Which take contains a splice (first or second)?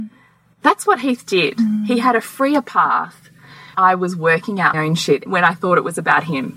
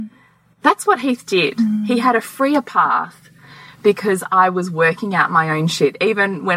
first